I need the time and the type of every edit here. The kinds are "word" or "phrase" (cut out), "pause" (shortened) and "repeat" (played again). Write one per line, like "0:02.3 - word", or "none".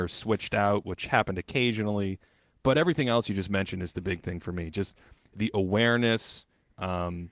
none